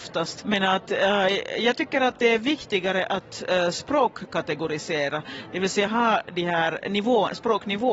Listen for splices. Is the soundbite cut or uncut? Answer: uncut